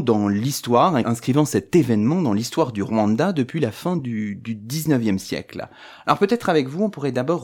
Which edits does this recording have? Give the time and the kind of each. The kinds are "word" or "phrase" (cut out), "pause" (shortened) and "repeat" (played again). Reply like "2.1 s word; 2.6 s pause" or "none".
none